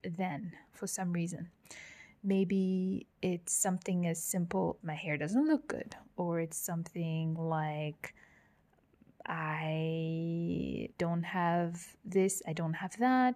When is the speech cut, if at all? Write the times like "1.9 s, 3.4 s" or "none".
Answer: 3.1 s, 4.8 s, 10.9 s